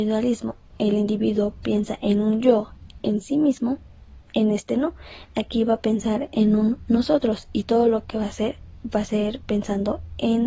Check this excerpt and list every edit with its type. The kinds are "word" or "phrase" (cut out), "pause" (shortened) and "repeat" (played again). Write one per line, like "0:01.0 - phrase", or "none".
0:03.0 - word